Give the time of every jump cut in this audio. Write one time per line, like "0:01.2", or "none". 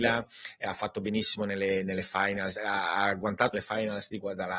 0:03.5